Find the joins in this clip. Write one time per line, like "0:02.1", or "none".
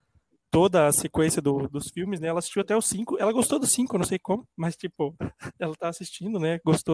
0:04.5
0:05.5